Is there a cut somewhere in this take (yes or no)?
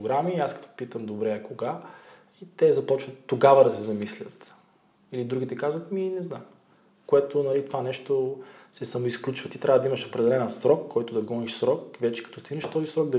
no